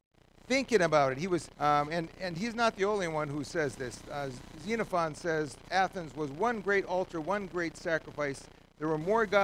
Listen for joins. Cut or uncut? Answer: cut